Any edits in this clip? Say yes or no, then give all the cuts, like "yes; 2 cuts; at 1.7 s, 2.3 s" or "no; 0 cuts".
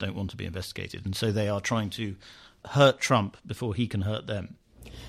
no; 0 cuts